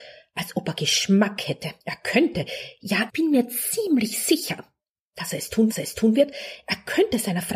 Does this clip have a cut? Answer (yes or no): yes